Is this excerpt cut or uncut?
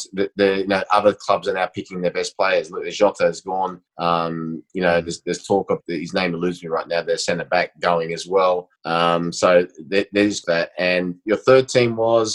cut